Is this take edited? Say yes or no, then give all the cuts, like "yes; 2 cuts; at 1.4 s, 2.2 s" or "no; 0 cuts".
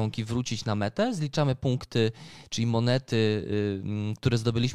no; 0 cuts